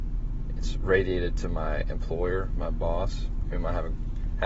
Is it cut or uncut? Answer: uncut